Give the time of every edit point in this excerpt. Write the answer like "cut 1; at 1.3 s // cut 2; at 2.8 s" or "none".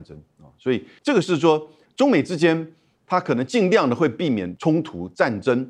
none